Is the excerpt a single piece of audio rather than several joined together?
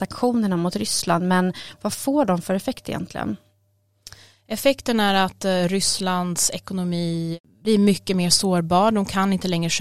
yes; 0 cuts

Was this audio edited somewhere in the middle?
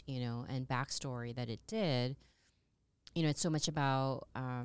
no; 0 cuts

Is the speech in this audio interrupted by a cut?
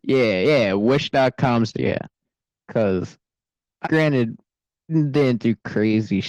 yes; 3 cuts; at 1.7 s, 3.8 s, 4.9 s

